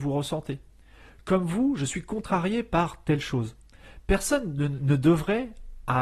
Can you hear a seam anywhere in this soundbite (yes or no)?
no